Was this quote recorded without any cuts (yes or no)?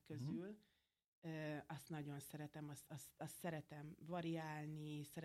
yes